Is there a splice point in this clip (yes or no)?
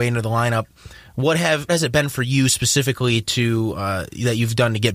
yes